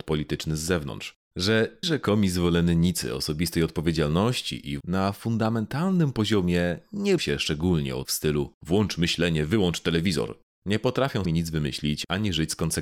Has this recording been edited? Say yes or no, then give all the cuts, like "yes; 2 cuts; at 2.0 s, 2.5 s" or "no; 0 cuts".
yes; 5 cuts; at 1.8 s, 4.8 s, 7.2 s, 8.0 s, 11.2 s